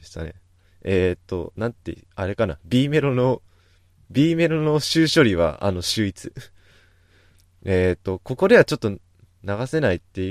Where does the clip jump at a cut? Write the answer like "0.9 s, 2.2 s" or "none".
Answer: none